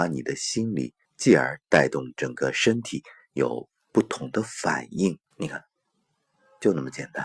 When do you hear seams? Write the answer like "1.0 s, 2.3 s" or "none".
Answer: 1.0 s, 5.3 s